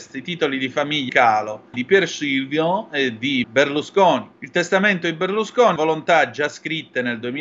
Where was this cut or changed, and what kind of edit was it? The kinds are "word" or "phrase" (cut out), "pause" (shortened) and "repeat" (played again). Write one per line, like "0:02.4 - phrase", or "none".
0:01.1 - word
0:01.7 - phrase
0:03.4 - word
0:04.4 - pause
0:05.8 - word